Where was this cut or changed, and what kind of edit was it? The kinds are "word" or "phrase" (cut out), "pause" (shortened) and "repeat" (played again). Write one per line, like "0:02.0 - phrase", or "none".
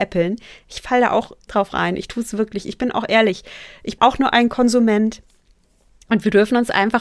0:01.5 - word
0:04.0 - word